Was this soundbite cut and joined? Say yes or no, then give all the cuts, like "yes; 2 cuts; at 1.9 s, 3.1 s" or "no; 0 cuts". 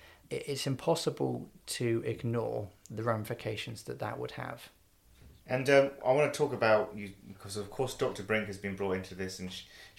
yes; 1 cut; at 5.4 s